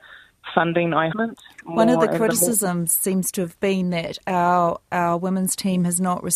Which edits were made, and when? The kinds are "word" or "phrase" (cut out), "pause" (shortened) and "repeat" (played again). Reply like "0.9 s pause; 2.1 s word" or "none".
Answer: 1.1 s phrase